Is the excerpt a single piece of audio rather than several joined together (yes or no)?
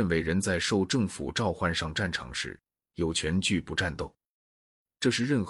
yes